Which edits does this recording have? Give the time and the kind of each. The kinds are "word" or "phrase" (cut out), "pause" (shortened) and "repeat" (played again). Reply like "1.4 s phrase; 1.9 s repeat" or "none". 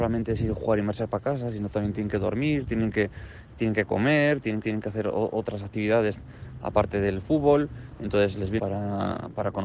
4.6 s repeat; 8.6 s phrase